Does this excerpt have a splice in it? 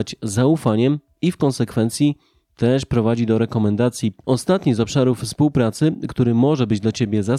no; 0 cuts

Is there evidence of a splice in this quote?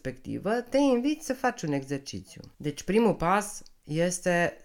yes; 1 cut; at 2.5 s

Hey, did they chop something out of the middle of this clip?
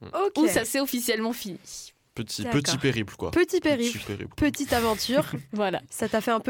no; 0 cuts

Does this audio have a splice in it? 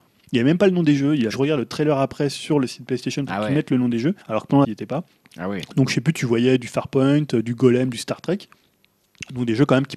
yes; 3 cuts; at 1.3 s, 4.2 s, 4.6 s

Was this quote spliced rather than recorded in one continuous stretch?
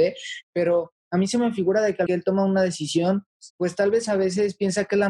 yes; 2 cuts; at 2.1 s, 3.5 s

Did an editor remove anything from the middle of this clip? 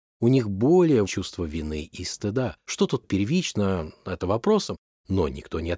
yes; 4 cuts; at 1.1 s, 2.6 s, 3.0 s, 4.2 s

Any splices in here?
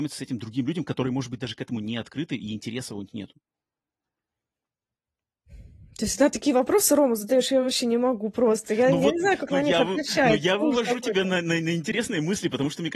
no; 0 cuts

